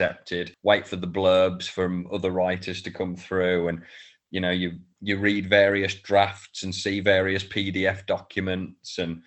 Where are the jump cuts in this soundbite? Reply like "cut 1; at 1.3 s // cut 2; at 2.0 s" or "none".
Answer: none